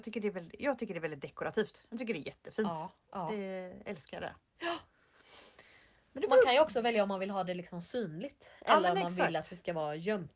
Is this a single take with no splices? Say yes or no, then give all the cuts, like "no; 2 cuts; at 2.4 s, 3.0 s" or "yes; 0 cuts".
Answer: yes; 0 cuts